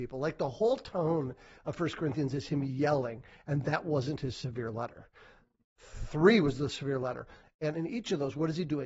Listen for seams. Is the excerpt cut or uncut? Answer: uncut